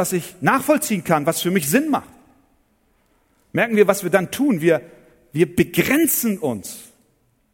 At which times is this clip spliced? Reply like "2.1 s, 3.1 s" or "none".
none